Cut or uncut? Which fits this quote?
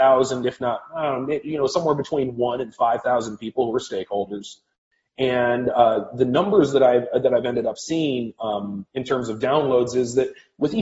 uncut